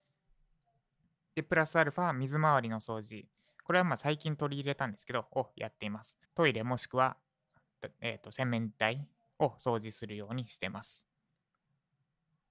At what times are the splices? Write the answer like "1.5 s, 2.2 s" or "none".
6.2 s